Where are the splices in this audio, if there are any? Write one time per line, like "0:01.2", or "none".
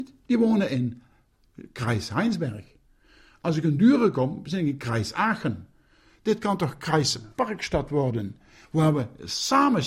none